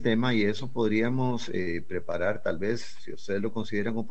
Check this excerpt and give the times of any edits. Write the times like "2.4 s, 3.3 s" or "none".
none